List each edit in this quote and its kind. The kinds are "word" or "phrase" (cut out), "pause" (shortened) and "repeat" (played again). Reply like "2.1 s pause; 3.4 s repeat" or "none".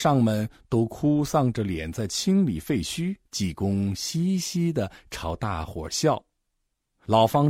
3.2 s pause

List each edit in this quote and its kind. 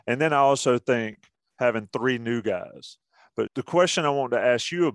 3.5 s word

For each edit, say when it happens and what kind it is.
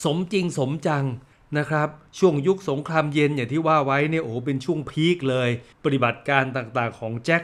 1.3 s pause; 5.7 s pause

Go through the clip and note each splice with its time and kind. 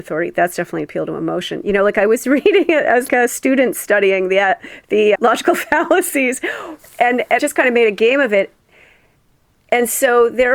3.1 s word; 5.1 s word; 7.4 s word

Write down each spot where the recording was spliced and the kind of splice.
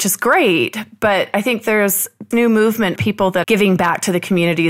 2.3 s word; 3.0 s word; 3.4 s word

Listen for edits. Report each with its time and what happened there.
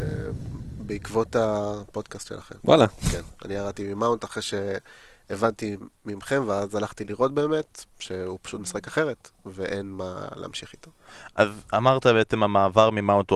7.9 s pause

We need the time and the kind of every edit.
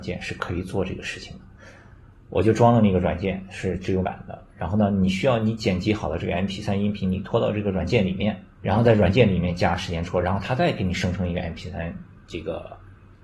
4.0 s word; 8.5 s pause

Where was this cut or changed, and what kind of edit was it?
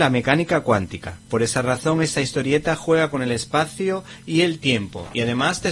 none

